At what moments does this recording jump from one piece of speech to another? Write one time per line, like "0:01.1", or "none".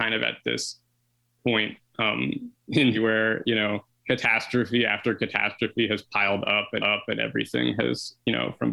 0:02.9
0:03.9
0:06.8